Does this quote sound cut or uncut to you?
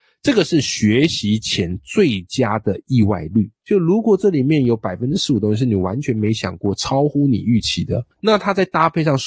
cut